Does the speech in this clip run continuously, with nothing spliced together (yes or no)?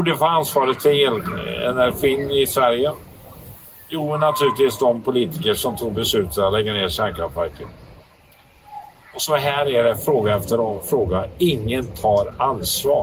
yes